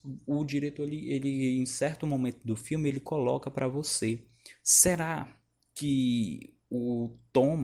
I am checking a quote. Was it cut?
no; 0 cuts

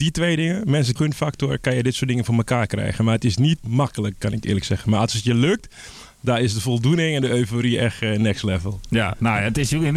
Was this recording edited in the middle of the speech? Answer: yes; 2 cuts; at 1.0 s, 3.6 s

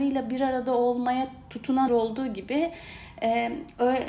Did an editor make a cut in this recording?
yes; 1 cut; at 1.9 s

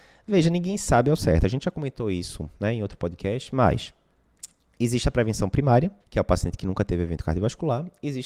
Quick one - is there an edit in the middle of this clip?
yes; 1 cut; at 6.0 s

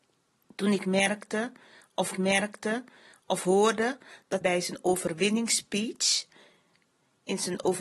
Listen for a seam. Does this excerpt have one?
yes; 2 cuts; at 2.1 s, 4.4 s

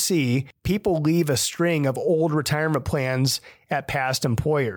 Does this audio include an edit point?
no; 0 cuts

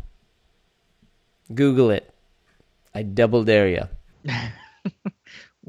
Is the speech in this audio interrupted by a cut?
no; 0 cuts

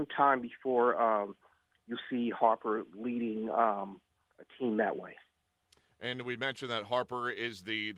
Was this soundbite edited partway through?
no; 0 cuts

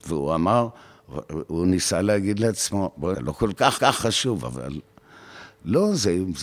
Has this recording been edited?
yes; 2 cuts; at 3.1 s, 3.8 s

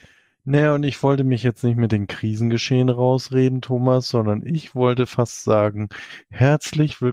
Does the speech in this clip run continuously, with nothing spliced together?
yes; 0 cuts

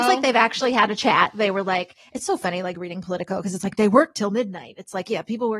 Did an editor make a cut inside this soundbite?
no; 0 cuts

